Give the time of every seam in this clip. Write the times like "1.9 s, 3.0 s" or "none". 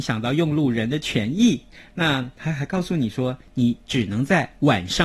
none